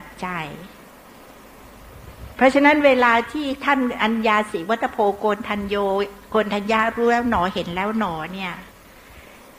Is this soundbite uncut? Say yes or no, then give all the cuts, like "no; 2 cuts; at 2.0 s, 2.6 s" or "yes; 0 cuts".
yes; 0 cuts